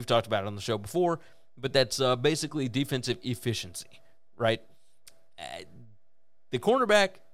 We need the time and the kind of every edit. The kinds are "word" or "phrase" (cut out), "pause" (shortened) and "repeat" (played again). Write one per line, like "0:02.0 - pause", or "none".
none